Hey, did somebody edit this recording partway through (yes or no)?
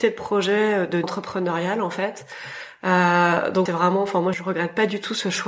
yes